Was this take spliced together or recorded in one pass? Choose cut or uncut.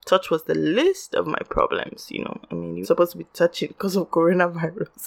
cut